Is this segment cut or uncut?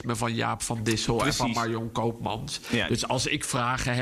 uncut